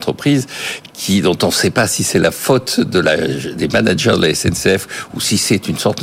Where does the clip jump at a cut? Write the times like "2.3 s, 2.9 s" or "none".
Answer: none

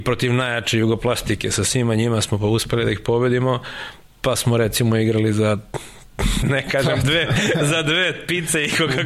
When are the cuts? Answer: 6.4 s

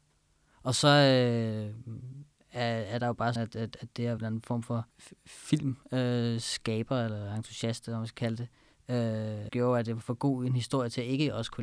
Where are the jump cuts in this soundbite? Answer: 3.4 s, 4.2 s, 4.9 s, 9.5 s

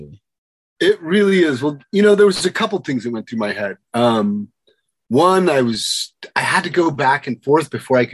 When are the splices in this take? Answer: none

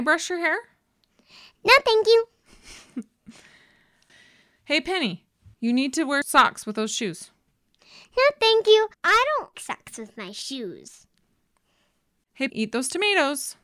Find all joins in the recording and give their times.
5.5 s, 8.9 s, 9.5 s, 12.5 s

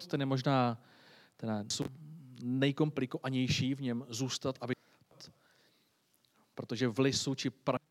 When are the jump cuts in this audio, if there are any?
none

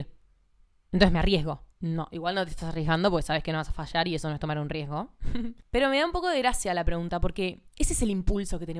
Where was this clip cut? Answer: 1.7 s, 5.6 s, 7.7 s

